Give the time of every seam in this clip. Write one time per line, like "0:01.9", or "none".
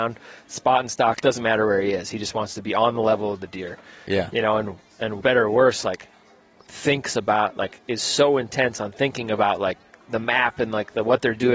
0:05.2